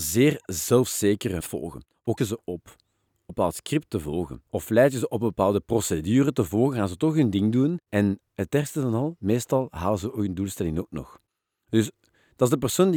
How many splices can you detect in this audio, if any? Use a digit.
5